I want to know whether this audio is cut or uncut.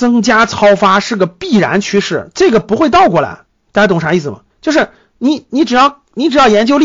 cut